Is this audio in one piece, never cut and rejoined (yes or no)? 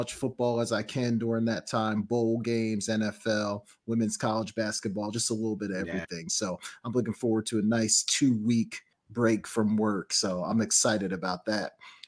no